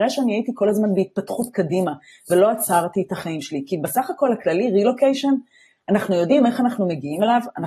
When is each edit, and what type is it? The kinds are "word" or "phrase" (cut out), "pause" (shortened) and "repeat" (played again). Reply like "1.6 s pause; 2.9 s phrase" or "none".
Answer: none